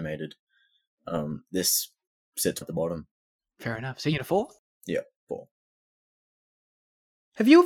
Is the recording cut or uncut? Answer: cut